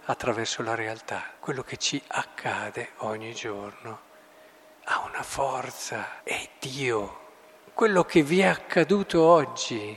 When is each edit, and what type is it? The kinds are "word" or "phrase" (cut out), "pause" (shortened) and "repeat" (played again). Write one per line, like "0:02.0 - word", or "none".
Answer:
0:01.4 - pause
0:06.2 - pause